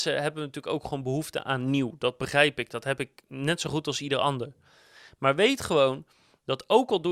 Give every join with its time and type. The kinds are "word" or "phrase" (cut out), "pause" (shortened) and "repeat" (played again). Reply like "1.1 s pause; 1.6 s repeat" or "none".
none